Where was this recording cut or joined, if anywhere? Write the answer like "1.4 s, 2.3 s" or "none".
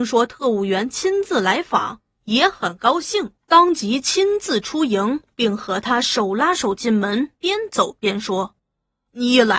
3.4 s